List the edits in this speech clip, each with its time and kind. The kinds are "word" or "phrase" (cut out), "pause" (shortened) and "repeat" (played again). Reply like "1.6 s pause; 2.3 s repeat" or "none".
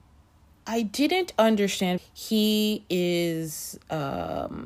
2.0 s phrase